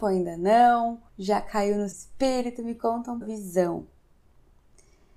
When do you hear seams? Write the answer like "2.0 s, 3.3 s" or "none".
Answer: 1.1 s, 1.9 s, 3.2 s